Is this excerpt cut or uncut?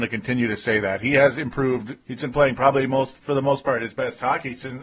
cut